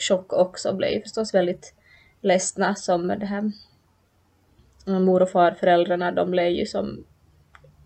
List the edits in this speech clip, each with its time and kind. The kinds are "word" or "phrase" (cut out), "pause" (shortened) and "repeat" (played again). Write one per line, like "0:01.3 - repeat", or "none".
none